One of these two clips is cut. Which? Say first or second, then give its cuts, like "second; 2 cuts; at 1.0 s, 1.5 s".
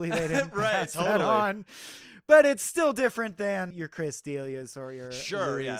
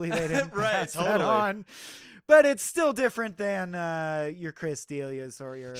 first; 1 cut; at 3.7 s